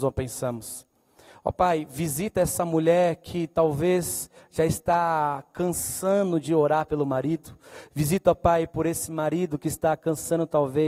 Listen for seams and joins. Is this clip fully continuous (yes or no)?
yes